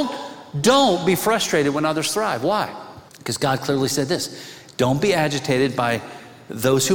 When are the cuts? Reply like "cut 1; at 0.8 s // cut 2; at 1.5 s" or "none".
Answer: cut 1; at 3.1 s